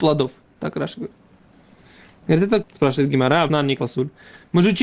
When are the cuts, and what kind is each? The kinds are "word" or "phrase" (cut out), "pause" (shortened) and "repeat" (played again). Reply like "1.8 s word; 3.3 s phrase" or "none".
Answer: 2.6 s word; 3.5 s word; 3.8 s word